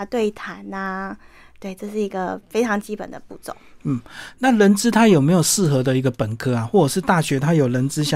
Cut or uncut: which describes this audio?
uncut